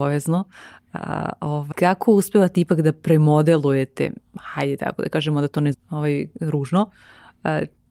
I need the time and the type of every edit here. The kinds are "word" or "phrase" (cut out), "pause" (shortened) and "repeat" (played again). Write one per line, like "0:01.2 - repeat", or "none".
0:01.7 - word
0:05.7 - word

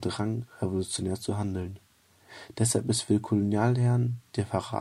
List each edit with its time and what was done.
none

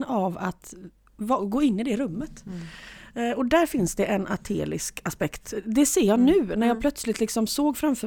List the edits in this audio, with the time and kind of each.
none

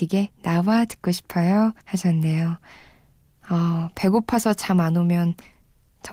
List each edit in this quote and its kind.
0:01.8 - pause

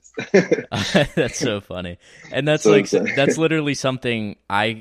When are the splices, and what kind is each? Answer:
none

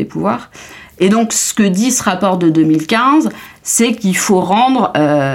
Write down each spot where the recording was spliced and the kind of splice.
none

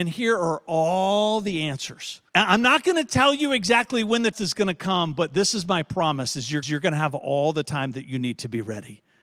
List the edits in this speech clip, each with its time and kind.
0:02.3 - pause
0:04.3 - word
0:06.6 - repeat

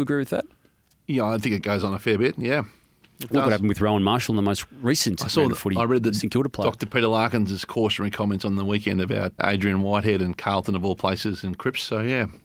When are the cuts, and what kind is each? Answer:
0:09.4 - word

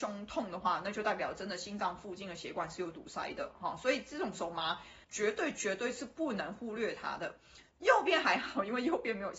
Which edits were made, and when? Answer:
0:05.0 - pause

